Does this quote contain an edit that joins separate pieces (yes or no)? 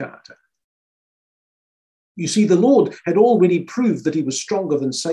no